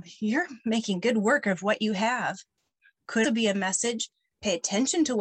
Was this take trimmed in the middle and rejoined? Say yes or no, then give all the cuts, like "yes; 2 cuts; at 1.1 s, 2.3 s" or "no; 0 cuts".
yes; 1 cut; at 3.2 s